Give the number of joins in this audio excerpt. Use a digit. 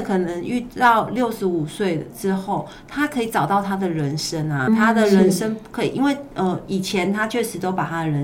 1